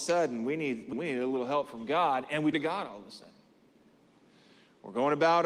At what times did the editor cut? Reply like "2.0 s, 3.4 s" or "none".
0.9 s, 2.5 s